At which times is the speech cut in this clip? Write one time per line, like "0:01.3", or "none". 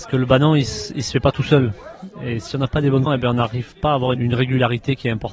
0:03.1
0:04.1